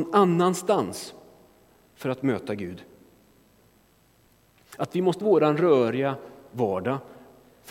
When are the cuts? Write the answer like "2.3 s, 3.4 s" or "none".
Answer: 5.2 s